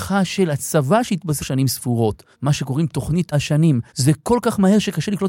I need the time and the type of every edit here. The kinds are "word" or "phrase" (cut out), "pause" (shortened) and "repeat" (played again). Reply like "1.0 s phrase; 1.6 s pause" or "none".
1.4 s word; 2.3 s pause; 3.3 s word; 3.9 s pause